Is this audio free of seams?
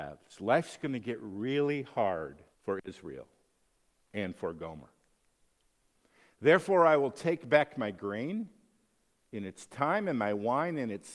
no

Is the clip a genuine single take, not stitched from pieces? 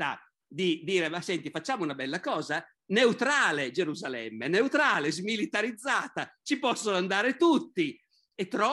yes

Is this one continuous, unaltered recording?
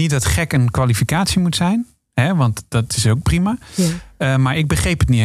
yes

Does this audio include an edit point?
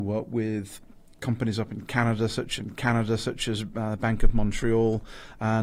yes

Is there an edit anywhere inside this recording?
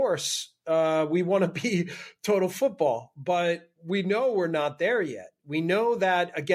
no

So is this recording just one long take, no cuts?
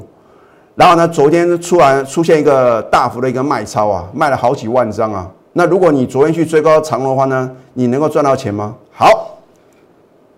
no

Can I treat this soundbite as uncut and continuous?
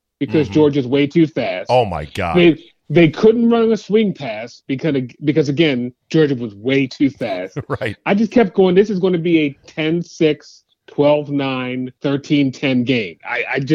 no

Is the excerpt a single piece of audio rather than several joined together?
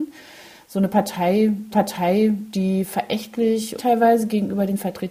no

